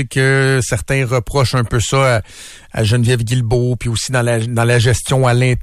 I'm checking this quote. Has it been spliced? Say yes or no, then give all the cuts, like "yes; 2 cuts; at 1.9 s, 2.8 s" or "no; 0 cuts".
no; 0 cuts